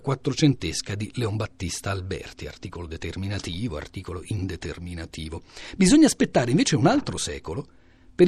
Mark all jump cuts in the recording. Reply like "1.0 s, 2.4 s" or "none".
none